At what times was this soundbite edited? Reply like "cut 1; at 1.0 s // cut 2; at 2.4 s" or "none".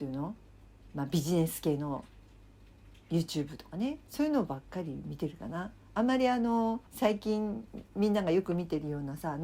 cut 1; at 6.9 s